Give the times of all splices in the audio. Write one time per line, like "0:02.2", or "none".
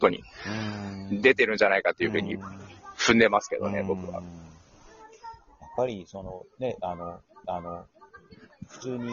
0:07.4